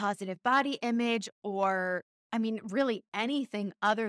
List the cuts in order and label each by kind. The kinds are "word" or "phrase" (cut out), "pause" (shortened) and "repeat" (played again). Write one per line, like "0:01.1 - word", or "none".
none

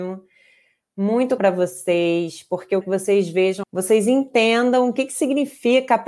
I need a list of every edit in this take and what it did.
0:01.4 - word
0:02.8 - word
0:03.6 - word

